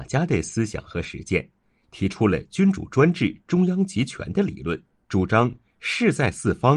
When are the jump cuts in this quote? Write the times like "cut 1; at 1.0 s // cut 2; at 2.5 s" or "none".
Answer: cut 1; at 4.9 s